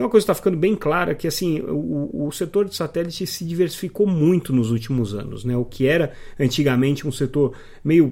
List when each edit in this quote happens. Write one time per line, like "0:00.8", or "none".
none